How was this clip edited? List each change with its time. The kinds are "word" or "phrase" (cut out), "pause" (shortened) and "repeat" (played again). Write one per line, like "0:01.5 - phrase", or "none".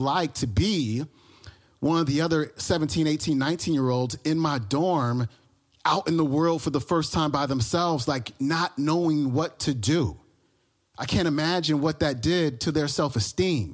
none